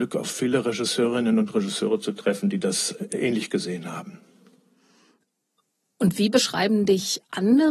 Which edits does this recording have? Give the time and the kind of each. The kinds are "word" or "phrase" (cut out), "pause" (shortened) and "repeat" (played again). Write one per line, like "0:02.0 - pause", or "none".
none